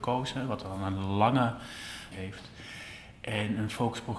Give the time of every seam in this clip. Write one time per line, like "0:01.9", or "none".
0:02.1